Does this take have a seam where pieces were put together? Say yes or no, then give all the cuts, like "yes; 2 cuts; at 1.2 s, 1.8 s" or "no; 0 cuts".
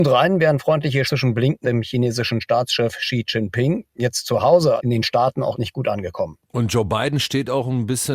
yes; 4 cuts; at 1.0 s, 1.6 s, 4.8 s, 5.5 s